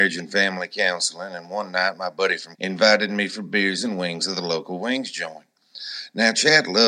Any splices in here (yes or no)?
yes